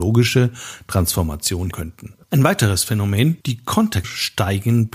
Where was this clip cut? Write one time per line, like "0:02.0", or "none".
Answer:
0:01.7
0:02.2
0:03.4
0:04.0

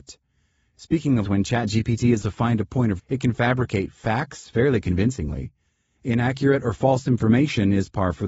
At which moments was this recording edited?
0:01.2
0:02.2
0:03.0

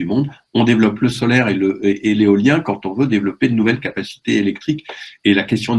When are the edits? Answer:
none

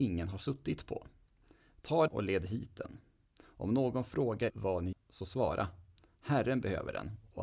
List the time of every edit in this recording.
0:02.1
0:04.5
0:04.9

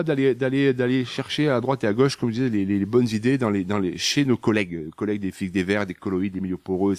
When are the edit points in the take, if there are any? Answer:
none

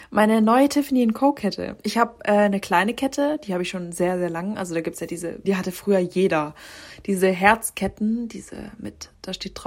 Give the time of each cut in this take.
0:05.4

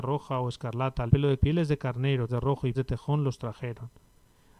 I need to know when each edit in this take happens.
0:01.1
0:01.4
0:02.3
0:02.7

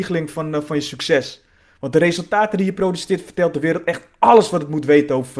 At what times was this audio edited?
none

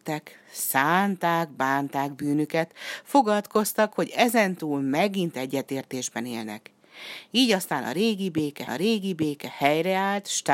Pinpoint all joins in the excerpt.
0:08.7

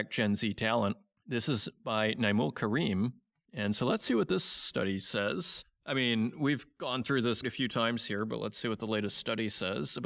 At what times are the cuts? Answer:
0:07.4

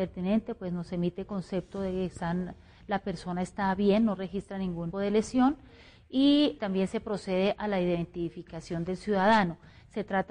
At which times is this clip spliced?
0:04.9
0:06.6

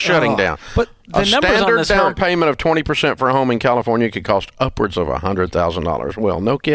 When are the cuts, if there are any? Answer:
none

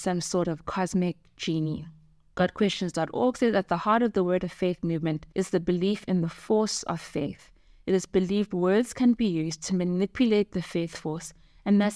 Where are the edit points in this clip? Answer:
none

